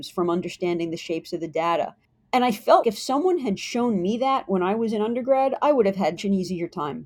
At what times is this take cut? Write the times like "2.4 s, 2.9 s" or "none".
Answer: 2.0 s, 2.8 s, 6.2 s